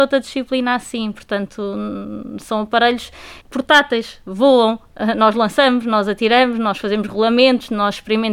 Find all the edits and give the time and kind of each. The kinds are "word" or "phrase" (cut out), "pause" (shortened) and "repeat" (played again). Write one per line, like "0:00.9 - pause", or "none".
0:03.4 - pause